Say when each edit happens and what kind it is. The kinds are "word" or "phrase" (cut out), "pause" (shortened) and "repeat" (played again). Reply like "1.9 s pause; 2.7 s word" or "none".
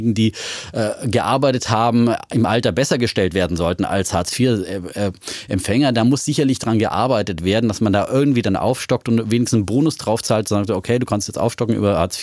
none